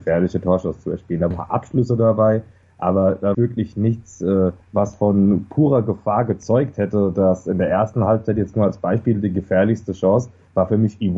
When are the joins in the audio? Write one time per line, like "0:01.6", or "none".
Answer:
0:01.3
0:03.3
0:04.6